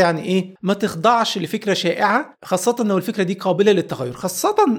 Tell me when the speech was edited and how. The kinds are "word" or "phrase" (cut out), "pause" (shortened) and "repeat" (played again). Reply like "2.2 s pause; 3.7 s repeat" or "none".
none